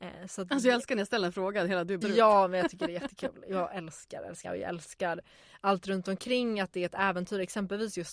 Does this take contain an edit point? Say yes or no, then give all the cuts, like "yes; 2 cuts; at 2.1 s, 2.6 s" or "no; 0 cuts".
yes; 2 cuts; at 2.0 s, 4.4 s